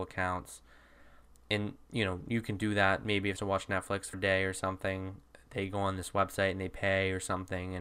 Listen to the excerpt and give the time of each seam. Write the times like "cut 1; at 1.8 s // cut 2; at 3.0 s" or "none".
cut 1; at 3.4 s // cut 2; at 4.1 s